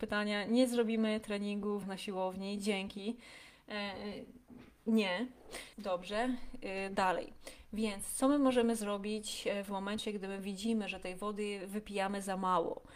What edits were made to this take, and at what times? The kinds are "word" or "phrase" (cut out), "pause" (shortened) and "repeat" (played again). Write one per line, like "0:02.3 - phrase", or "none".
0:01.8 - word
0:05.7 - pause